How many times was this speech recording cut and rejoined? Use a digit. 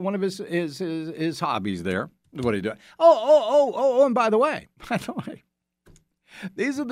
1